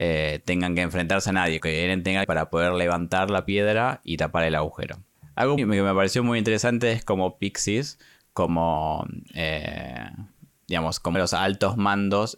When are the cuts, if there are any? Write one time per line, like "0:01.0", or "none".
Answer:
0:01.6
0:02.2
0:05.6
0:11.1